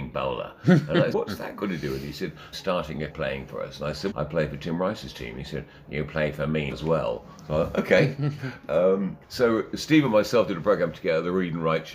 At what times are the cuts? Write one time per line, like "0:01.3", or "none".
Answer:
0:01.1
0:02.5
0:03.1
0:04.1
0:06.7
0:09.2